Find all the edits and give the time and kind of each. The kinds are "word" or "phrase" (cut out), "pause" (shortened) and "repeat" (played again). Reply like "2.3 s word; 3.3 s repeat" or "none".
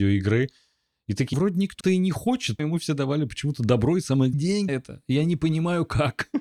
1.3 s word; 1.8 s word; 2.6 s word; 4.3 s word; 4.7 s word

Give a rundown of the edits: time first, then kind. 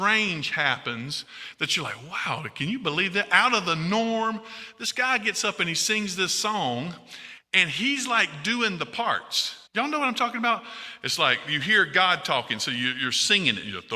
9.7 s pause

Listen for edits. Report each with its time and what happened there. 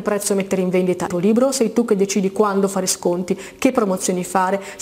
1.1 s word

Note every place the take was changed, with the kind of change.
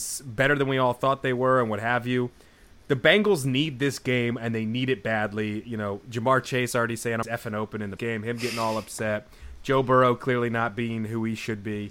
7.2 s word; 8.0 s word

